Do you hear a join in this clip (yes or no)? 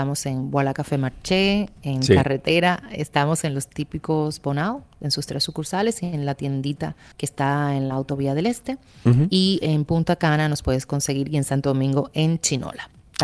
yes